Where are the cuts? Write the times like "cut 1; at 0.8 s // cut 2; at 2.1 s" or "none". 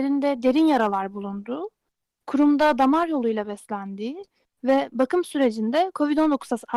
none

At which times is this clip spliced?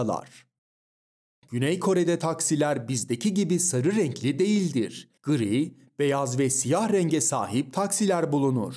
cut 1; at 5.2 s

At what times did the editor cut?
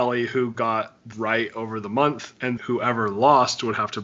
cut 1; at 1.1 s // cut 2; at 2.6 s

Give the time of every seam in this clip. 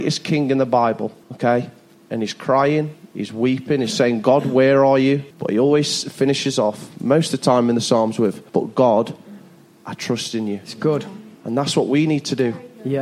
cut 1; at 1.2 s // cut 2; at 5.3 s // cut 3; at 8.5 s // cut 4; at 11.3 s

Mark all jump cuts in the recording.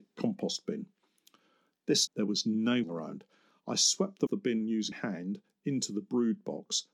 cut 1; at 2.1 s // cut 2; at 2.8 s // cut 3; at 4.3 s // cut 4; at 4.9 s

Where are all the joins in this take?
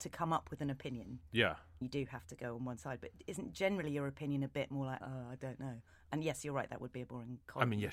cut 1; at 1.8 s // cut 2; at 5.0 s

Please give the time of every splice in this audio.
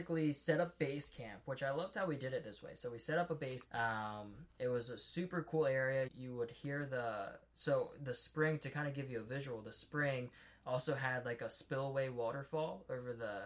cut 1; at 3.7 s // cut 2; at 6.1 s

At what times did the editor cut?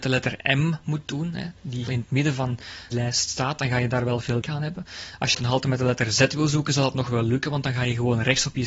cut 1; at 1.9 s // cut 2; at 2.9 s // cut 3; at 4.4 s // cut 4; at 5.3 s

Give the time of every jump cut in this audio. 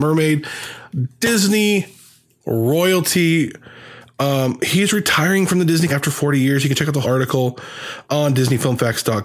cut 1; at 5.9 s // cut 2; at 7.0 s // cut 3; at 8.1 s

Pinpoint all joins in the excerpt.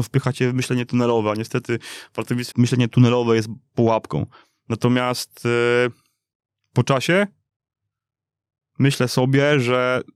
cut 1; at 2.5 s

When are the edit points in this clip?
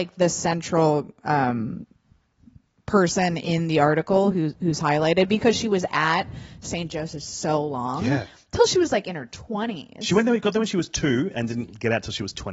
none

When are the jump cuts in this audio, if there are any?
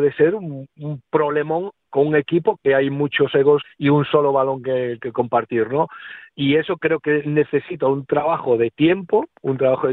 cut 1; at 3.6 s

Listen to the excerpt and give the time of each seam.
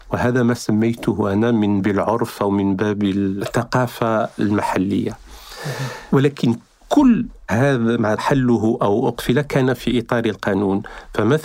cut 1; at 1.8 s // cut 2; at 8.2 s

